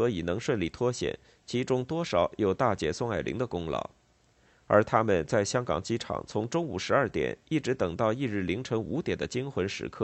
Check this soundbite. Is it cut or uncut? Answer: uncut